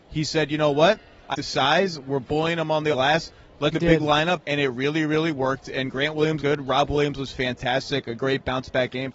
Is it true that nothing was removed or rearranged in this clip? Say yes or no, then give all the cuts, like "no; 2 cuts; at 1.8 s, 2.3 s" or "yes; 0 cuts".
no; 5 cuts; at 1.3 s, 2.9 s, 3.7 s, 4.4 s, 6.4 s